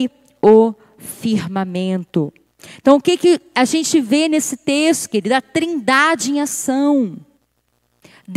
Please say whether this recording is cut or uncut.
uncut